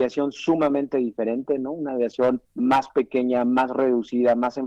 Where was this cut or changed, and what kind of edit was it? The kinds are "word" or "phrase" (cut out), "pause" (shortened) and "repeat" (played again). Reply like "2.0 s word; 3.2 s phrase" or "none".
2.5 s pause